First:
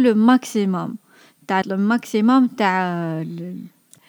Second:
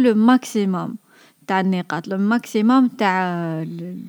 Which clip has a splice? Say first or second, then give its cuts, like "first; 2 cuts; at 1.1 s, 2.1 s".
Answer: first; 1 cut; at 1.6 s